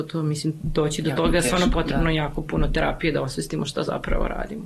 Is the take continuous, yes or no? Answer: yes